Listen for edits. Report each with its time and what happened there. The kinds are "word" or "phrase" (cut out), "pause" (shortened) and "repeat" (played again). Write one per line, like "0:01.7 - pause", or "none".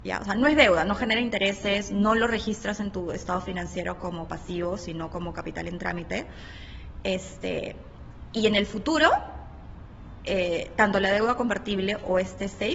none